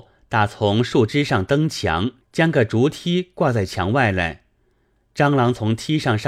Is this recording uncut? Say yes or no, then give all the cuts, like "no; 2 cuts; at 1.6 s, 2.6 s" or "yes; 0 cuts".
no; 1 cut; at 2.2 s